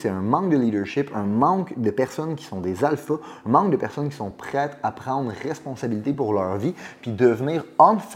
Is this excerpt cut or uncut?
uncut